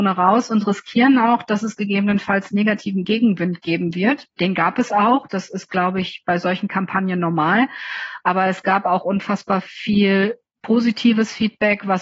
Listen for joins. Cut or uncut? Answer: uncut